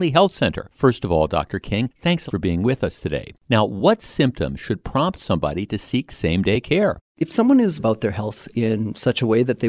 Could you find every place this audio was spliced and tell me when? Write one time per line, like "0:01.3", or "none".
0:02.3
0:07.8